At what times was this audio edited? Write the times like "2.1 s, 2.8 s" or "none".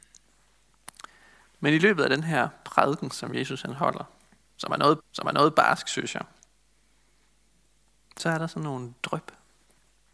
5.0 s